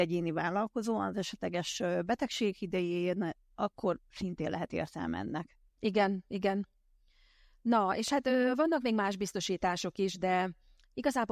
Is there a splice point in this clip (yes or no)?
no